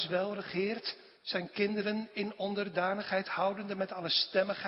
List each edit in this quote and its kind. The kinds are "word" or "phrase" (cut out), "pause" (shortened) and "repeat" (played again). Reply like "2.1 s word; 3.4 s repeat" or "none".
1.2 s pause